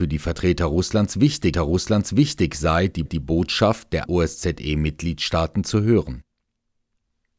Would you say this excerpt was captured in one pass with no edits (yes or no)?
no